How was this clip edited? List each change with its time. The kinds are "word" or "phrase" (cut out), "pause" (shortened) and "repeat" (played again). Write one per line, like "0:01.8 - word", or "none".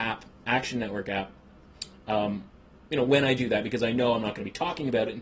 none